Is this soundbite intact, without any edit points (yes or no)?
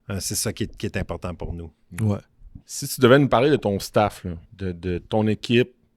no